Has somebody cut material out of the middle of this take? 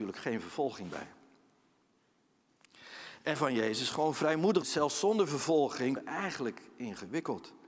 yes; 3 cuts; at 3.4 s, 4.6 s, 6.0 s

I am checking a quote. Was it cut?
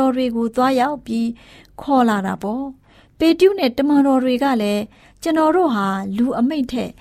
no; 0 cuts

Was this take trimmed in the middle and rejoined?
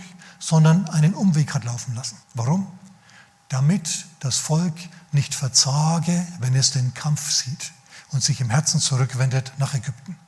yes; 1 cut; at 2.2 s

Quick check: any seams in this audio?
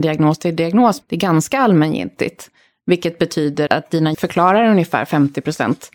yes; 3 cuts; at 1.0 s, 3.7 s, 4.1 s

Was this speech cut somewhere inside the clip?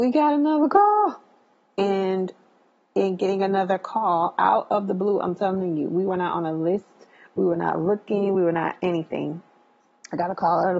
no; 0 cuts

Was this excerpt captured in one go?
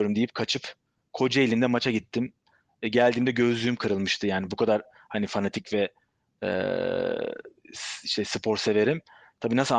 yes; 0 cuts

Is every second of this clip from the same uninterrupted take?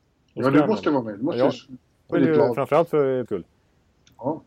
no; 2 cuts; at 2.1 s, 3.3 s

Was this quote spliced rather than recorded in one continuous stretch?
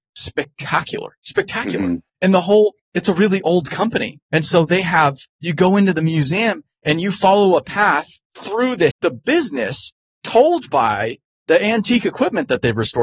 yes; 4 cuts; at 2.8 s, 4.2 s, 8.2 s, 8.9 s

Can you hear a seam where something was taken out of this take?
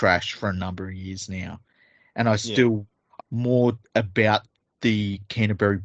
yes; 1 cut; at 3.2 s

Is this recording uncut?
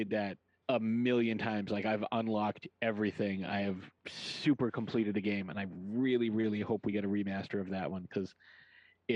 yes; 0 cuts

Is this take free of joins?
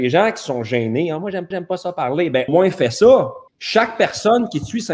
no; 3 cuts; at 1.5 s, 2.5 s, 3.5 s

